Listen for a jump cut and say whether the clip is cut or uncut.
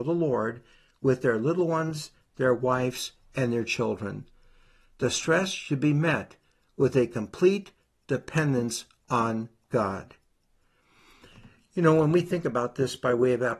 uncut